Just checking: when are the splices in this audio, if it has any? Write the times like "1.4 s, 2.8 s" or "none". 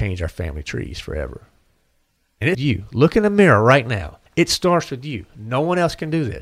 2.5 s, 4.3 s